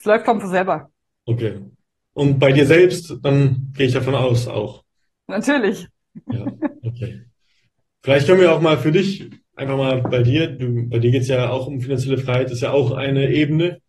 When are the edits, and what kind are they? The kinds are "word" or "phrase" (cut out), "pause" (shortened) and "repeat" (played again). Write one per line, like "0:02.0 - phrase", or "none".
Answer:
none